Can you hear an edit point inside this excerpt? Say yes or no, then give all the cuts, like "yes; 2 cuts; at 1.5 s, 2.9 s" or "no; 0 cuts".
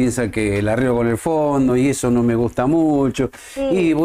no; 0 cuts